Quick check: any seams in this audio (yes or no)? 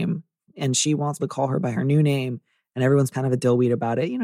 yes